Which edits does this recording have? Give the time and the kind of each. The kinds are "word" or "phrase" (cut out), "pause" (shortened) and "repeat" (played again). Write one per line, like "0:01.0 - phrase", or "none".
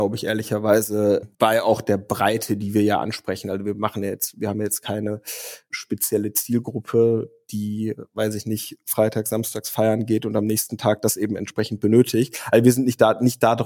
0:01.3 - pause